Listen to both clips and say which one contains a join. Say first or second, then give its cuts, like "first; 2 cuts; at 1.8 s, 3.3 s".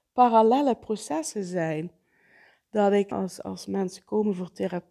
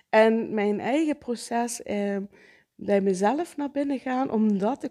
first; 2 cuts; at 3.1 s, 3.4 s